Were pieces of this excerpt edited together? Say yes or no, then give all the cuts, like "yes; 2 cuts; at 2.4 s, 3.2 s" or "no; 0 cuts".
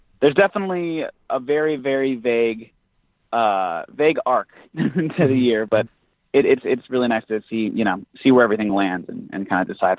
no; 0 cuts